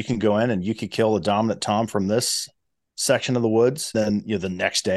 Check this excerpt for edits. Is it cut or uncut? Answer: cut